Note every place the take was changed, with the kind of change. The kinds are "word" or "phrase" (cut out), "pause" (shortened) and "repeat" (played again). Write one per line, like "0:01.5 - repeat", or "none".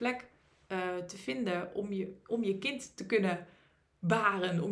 none